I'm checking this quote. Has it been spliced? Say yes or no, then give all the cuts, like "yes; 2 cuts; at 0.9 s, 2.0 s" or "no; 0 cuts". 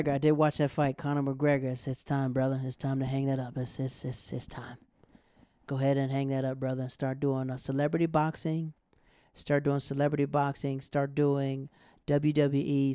no; 0 cuts